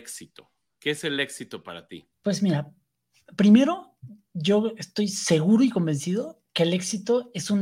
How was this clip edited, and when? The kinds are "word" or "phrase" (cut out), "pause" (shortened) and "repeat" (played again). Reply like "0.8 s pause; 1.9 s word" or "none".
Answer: 2.1 s pause